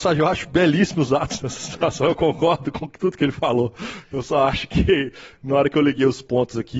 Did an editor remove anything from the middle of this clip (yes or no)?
no